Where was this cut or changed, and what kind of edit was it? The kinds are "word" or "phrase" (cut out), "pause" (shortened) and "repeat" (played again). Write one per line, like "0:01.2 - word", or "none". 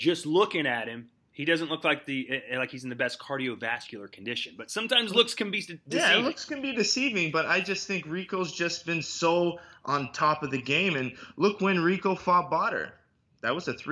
none